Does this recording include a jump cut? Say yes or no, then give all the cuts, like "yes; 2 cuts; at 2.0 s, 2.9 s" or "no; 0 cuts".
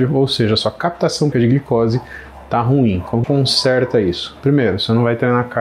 yes; 2 cuts; at 1.3 s, 3.2 s